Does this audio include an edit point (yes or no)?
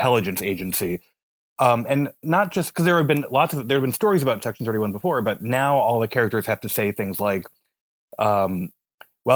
no